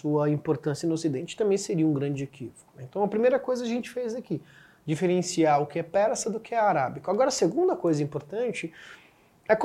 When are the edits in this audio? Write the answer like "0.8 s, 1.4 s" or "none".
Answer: none

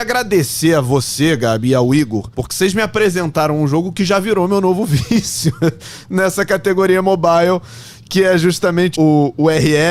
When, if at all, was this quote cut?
2.3 s, 8.9 s

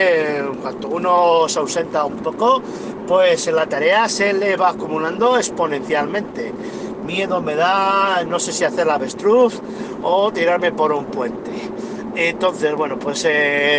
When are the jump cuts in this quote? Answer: none

